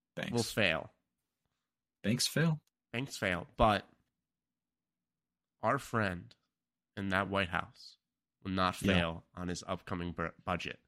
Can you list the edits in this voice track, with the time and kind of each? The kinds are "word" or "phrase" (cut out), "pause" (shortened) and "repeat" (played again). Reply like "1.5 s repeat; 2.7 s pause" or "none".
none